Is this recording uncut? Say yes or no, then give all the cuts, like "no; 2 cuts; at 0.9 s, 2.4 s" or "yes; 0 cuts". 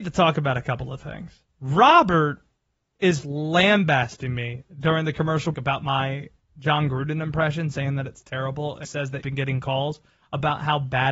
no; 5 cuts; at 1.5 s, 3.2 s, 5.5 s, 8.8 s, 9.2 s